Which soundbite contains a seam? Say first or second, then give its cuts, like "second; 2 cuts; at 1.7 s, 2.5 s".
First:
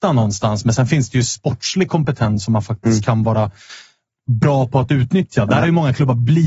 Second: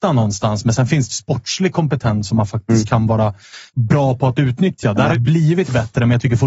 second; 3 cuts; at 1.1 s, 3.7 s, 5.1 s